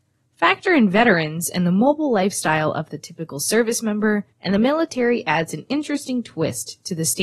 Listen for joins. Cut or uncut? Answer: cut